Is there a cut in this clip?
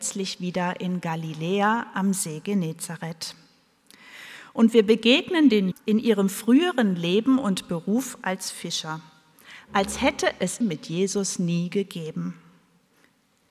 yes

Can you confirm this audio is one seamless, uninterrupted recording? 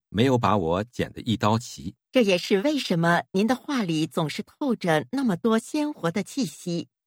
no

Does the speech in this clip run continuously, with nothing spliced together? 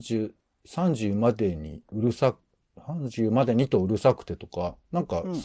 yes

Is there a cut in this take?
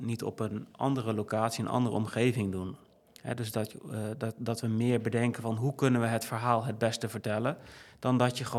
no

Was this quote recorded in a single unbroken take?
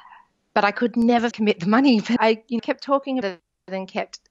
no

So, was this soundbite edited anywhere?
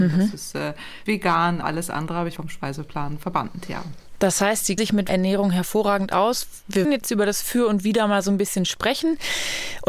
yes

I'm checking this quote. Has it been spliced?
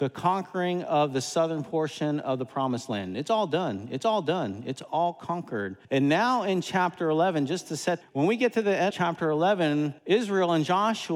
yes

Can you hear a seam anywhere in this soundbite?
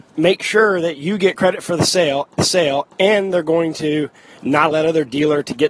yes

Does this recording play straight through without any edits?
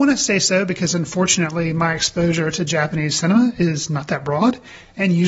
yes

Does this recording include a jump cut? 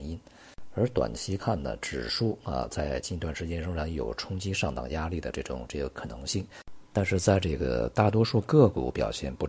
no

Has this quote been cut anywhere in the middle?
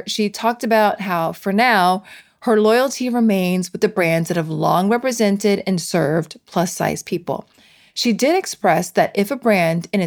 no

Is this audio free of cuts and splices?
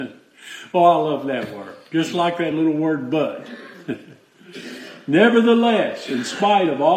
yes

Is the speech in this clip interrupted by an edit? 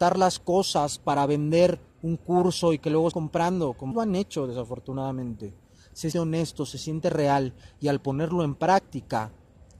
yes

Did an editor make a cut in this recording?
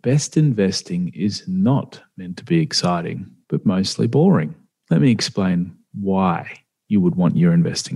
no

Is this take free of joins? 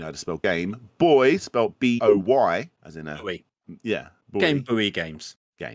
no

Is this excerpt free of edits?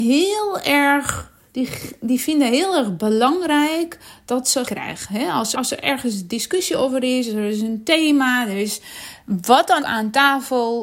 no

